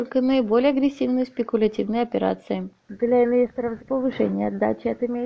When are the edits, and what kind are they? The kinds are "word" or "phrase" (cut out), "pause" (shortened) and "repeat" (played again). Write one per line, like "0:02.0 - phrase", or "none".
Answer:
0:02.8 - pause
0:03.8 - word